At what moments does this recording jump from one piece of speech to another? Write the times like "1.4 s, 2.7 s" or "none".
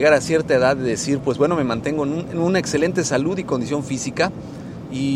none